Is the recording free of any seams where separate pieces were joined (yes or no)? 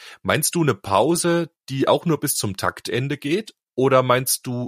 yes